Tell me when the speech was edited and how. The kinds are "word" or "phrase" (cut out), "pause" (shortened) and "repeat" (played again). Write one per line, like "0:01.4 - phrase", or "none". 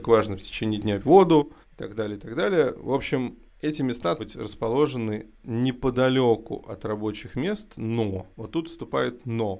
0:01.0 - word
0:01.6 - pause
0:03.5 - pause
0:04.2 - phrase
0:08.3 - pause